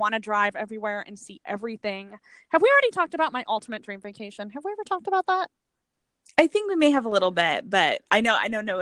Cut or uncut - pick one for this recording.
uncut